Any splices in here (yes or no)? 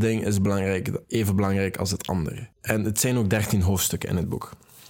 yes